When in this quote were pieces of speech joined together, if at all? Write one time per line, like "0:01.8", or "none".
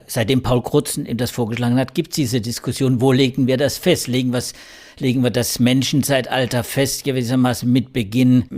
none